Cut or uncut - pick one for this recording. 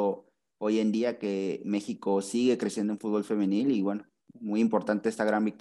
uncut